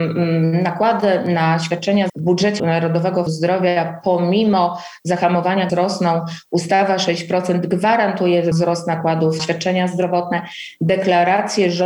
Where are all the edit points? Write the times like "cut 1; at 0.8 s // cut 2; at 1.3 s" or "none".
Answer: cut 1; at 2.1 s // cut 2; at 2.6 s // cut 3; at 3.3 s // cut 4; at 5.7 s // cut 5; at 8.5 s // cut 6; at 9.4 s